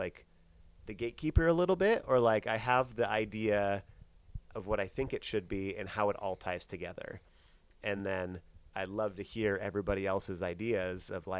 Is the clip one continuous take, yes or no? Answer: yes